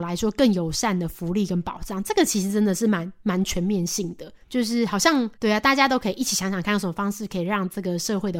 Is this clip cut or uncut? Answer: cut